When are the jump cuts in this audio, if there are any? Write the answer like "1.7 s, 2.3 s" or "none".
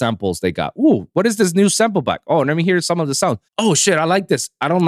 3.5 s